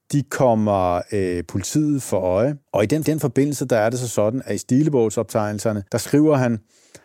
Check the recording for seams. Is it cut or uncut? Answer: cut